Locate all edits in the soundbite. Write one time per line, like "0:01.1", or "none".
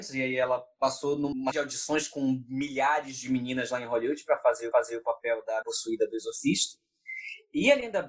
0:01.5
0:04.7
0:05.6

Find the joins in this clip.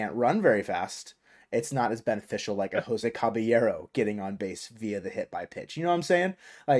none

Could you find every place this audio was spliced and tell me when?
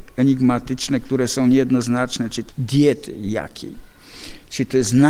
0:02.5

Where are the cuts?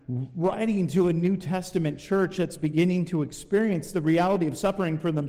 none

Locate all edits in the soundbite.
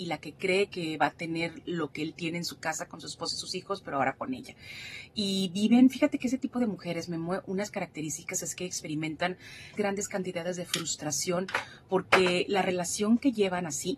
0:09.8

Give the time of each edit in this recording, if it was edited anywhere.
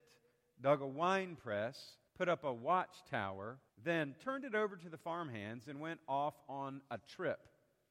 0:02.1
0:03.7

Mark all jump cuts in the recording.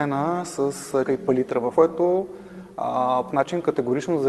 0:01.1
0:01.8
0:03.3

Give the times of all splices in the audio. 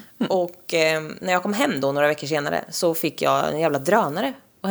none

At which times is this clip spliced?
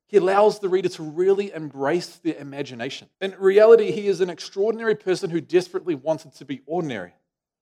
0:03.1

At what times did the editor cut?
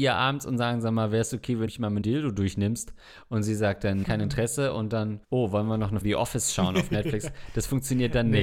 0:01.7
0:02.0
0:04.0
0:05.2
0:06.0

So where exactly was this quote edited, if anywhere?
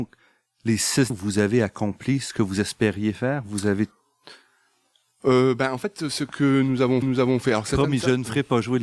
0:01.1
0:07.0

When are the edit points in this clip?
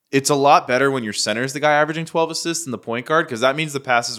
none

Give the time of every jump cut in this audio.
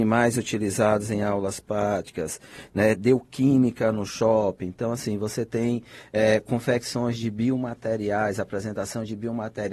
none

